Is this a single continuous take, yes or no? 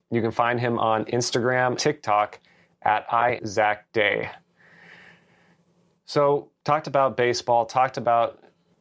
no